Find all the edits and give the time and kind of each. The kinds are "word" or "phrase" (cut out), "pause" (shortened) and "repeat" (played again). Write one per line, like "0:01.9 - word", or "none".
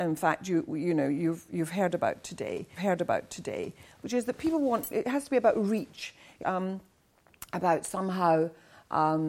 0:02.8 - repeat
0:06.4 - phrase